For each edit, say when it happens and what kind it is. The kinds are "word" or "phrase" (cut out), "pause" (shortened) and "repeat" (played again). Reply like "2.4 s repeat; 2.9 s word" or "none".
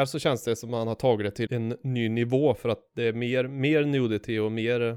1.5 s word